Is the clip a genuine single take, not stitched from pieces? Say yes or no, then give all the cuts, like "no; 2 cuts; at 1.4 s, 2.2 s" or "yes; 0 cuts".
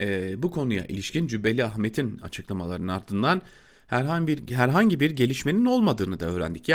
yes; 0 cuts